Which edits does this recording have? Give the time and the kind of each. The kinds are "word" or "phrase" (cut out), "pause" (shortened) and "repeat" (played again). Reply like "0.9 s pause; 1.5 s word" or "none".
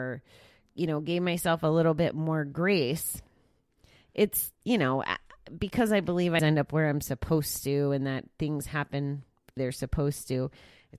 4.6 s pause; 6.4 s word; 9.6 s word